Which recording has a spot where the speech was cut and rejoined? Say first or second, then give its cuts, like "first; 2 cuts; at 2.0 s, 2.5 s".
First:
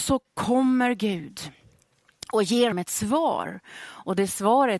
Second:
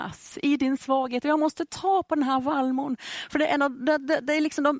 first; 1 cut; at 2.7 s